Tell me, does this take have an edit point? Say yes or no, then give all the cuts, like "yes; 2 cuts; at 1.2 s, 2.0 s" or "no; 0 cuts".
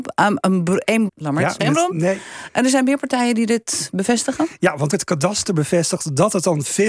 yes; 3 cuts; at 1.1 s, 1.6 s, 4.9 s